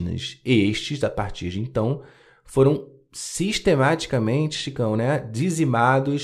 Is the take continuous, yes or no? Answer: yes